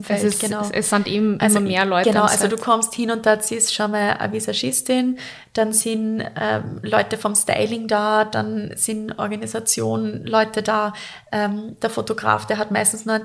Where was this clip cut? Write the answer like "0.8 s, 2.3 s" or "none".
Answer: none